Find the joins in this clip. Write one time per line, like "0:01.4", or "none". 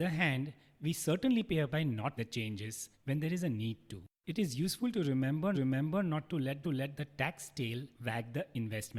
0:01.7
0:02.2
0:02.9
0:04.1
0:05.5
0:06.6
0:07.9